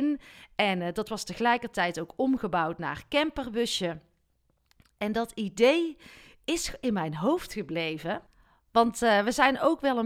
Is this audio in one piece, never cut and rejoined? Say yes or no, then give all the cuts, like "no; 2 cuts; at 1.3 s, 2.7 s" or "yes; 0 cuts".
yes; 0 cuts